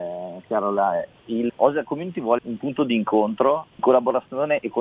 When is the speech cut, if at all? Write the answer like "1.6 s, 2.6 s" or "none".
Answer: 1.5 s, 2.4 s, 3.8 s